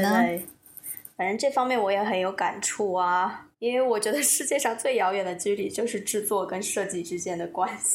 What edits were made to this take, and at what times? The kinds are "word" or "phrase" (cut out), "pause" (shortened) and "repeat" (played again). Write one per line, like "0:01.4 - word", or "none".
0:03.5 - pause